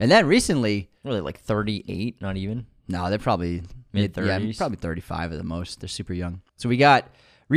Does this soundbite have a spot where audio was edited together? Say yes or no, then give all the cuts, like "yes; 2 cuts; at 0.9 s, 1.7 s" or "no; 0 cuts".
yes; 2 cuts; at 1.0 s, 6.5 s